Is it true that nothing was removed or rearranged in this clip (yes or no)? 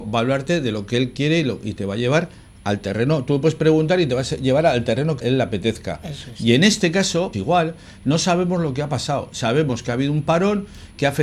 no